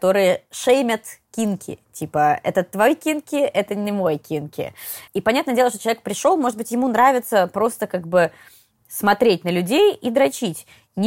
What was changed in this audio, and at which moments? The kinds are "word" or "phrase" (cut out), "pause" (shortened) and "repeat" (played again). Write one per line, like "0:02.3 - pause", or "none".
0:05.1 - pause